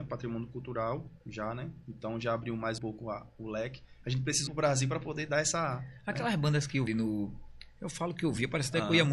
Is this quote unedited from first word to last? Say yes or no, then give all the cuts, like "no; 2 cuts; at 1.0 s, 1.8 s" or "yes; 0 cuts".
no; 3 cuts; at 2.8 s, 4.5 s, 6.9 s